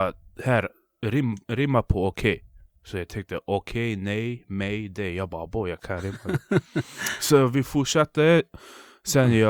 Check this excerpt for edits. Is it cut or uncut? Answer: uncut